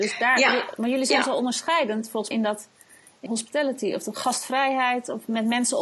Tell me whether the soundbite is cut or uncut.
cut